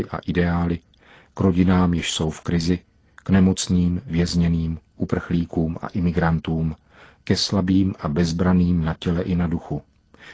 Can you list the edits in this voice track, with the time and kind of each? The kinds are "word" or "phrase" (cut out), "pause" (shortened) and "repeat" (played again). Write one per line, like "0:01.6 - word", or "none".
none